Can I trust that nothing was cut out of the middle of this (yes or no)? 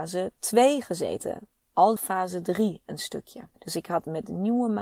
no